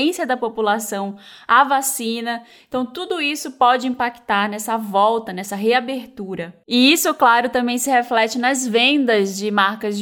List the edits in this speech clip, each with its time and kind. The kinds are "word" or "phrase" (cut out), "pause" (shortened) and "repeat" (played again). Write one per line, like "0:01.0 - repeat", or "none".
none